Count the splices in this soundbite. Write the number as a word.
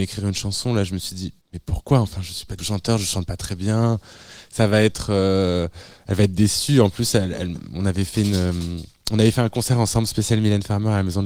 two